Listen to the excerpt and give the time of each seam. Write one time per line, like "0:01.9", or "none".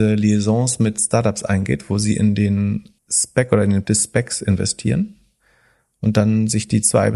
0:03.0
0:03.8